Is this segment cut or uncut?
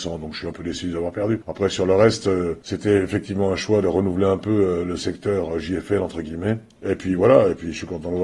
uncut